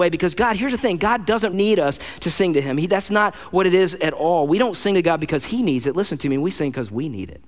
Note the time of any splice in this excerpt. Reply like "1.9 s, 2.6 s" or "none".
1.5 s